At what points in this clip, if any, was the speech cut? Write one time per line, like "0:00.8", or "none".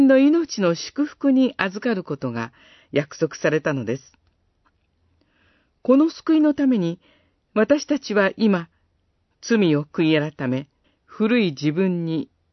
0:10.8